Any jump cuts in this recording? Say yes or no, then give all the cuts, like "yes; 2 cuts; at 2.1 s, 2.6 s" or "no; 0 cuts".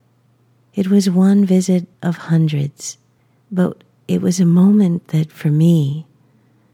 yes; 2 cuts; at 1.9 s, 3.2 s